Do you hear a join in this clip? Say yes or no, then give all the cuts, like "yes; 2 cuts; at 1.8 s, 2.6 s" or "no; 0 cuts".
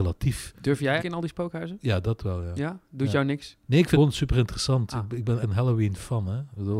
yes; 4 cuts; at 1.0 s, 3.6 s, 3.9 s, 5.4 s